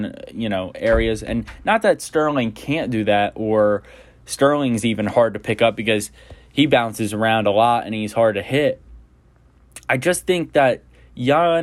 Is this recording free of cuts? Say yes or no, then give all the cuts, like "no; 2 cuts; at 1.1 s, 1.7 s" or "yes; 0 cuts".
yes; 0 cuts